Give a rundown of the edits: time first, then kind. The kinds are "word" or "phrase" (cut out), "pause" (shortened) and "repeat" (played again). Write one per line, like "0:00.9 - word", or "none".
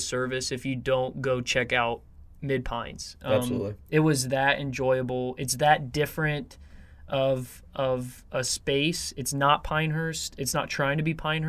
none